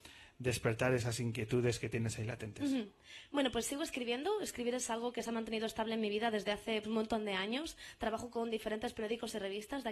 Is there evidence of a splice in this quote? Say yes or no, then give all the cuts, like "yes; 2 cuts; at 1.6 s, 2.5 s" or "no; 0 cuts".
yes; 1 cut; at 6.8 s